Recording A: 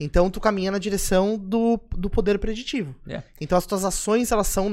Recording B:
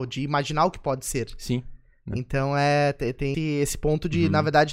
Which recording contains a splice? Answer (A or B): B